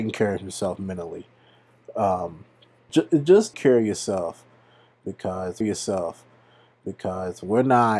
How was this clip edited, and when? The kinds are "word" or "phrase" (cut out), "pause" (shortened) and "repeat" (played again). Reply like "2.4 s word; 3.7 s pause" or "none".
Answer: 2.9 s word; 3.5 s word; 5.6 s repeat